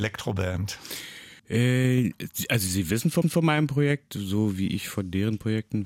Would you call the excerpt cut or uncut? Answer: cut